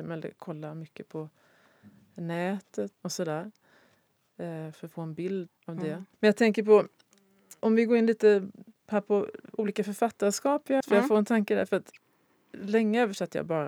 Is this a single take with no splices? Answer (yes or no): no